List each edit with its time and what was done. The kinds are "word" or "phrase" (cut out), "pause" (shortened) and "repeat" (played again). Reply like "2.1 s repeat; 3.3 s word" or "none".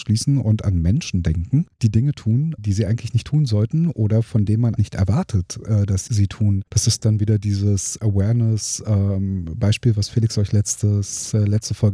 1.7 s pause; 2.6 s word; 4.8 s word; 6.1 s word; 6.7 s pause; 8.0 s word